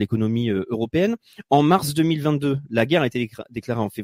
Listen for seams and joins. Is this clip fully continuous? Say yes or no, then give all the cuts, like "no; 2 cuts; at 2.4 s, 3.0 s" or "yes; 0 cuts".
yes; 0 cuts